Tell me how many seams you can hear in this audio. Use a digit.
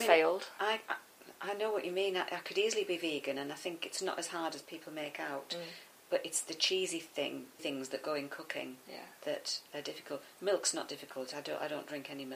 1